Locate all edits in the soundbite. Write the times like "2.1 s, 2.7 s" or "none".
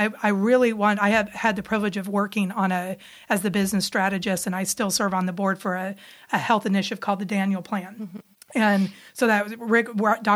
none